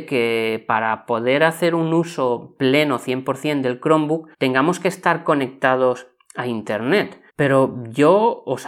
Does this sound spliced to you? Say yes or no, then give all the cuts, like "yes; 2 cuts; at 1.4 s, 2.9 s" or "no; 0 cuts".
yes; 2 cuts; at 4.3 s, 7.3 s